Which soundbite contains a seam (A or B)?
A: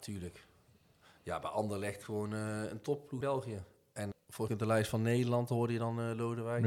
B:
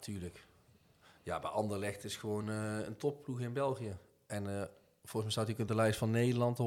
A